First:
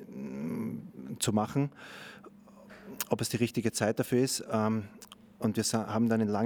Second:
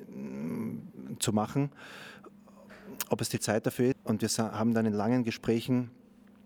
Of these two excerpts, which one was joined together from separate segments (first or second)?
second